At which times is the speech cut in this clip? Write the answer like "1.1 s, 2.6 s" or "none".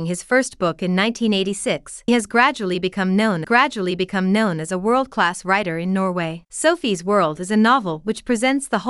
2.1 s, 3.4 s, 6.5 s